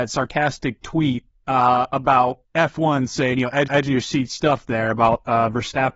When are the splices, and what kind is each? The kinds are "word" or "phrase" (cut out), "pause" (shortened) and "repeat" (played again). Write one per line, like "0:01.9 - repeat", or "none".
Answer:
0:01.3 - pause
0:02.5 - pause
0:03.7 - repeat